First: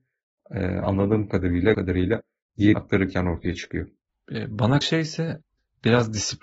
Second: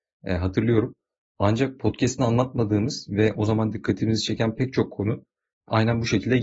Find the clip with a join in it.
first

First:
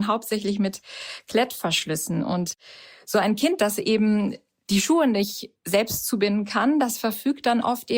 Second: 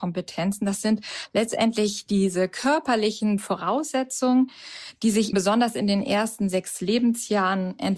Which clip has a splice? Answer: second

